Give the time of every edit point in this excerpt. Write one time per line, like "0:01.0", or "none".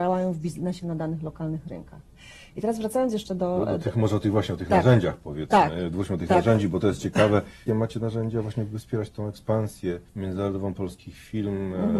0:07.7
0:10.1